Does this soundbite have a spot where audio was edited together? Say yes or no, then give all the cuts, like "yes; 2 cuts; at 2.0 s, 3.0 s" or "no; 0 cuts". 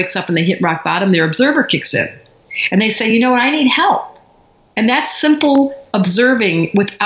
no; 0 cuts